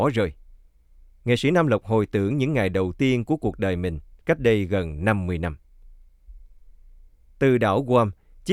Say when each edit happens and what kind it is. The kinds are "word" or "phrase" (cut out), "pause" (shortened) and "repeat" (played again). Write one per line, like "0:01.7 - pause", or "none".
none